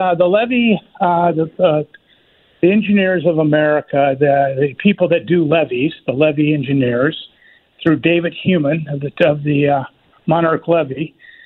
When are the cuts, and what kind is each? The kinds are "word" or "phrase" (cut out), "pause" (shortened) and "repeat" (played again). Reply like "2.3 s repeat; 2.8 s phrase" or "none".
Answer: none